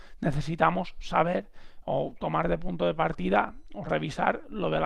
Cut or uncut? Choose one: uncut